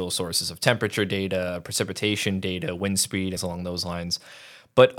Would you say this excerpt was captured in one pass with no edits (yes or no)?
no